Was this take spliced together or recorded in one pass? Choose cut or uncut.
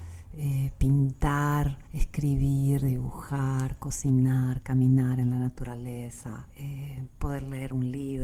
cut